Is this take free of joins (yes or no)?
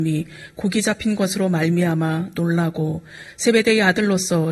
yes